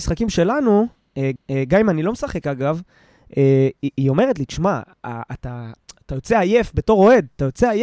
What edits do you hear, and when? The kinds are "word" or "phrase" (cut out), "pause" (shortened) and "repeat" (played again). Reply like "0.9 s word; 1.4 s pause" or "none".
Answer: 1.4 s repeat